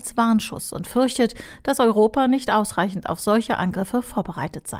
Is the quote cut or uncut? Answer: uncut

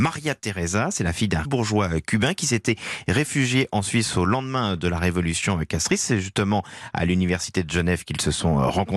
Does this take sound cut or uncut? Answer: cut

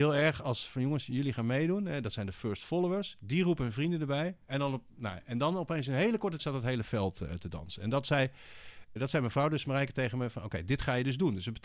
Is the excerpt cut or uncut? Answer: cut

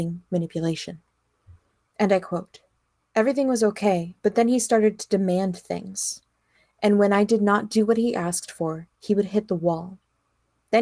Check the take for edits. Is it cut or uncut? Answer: uncut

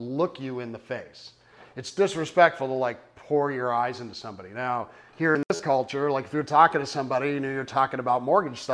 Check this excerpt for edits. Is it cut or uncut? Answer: uncut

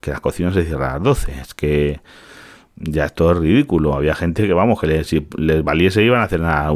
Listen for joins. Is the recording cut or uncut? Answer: uncut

